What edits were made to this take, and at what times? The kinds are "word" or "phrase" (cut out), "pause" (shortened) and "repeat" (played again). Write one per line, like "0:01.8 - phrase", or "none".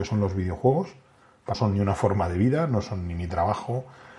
0:01.5 - phrase